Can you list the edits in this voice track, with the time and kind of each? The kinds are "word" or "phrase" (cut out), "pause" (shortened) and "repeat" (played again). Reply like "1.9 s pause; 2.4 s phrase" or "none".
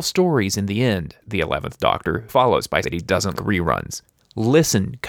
1.2 s word; 2.3 s word; 2.8 s word; 3.4 s word